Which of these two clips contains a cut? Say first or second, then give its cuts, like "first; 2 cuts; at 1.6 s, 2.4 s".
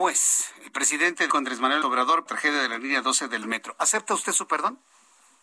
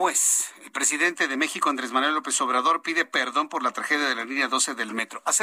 first; 3 cuts; at 1.3 s, 1.8 s, 2.3 s